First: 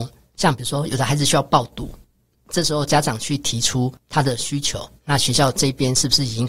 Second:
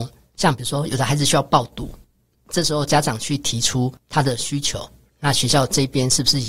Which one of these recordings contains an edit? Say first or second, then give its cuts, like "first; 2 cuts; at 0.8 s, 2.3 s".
first; 1 cut; at 5.0 s